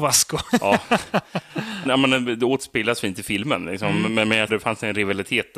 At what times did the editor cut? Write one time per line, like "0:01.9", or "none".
0:01.9
0:04.5